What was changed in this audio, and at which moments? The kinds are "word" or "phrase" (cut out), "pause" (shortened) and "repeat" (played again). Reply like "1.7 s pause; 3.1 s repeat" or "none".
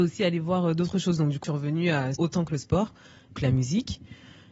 1.4 s word; 2.1 s phrase; 3.4 s word